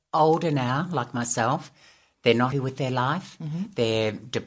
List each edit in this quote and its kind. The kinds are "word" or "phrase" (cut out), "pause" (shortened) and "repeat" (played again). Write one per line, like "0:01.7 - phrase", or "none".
0:02.5 - word